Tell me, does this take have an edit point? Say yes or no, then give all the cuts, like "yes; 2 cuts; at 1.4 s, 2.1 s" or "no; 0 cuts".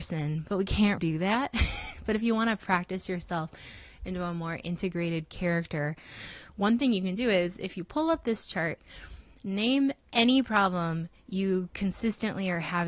yes; 2 cuts; at 1.0 s, 10.0 s